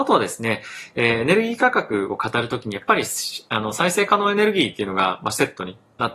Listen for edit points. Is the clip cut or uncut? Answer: uncut